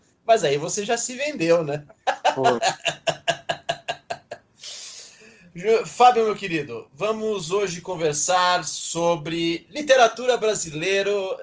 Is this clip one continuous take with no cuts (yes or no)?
yes